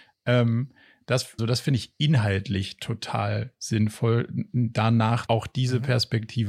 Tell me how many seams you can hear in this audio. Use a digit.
2